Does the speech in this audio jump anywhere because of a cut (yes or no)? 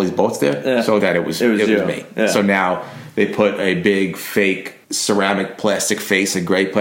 yes